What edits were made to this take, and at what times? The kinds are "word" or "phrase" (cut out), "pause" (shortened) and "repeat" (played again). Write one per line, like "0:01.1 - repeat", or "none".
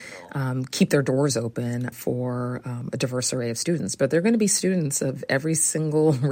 0:01.9 - word